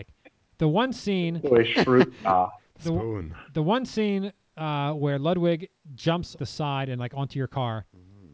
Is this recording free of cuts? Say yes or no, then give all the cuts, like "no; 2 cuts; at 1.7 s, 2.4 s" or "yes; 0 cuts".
no; 1 cut; at 6.4 s